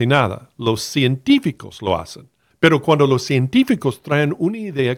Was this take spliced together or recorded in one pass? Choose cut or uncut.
cut